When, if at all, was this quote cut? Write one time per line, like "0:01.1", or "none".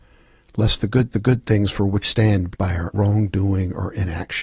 0:01.1
0:02.0
0:02.5
0:02.9